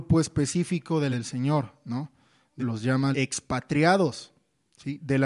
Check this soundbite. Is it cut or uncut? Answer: cut